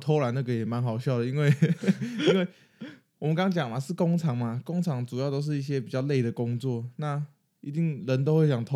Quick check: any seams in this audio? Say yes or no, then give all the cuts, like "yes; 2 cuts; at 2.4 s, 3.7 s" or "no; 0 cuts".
no; 0 cuts